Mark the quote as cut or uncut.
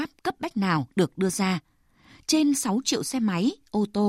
uncut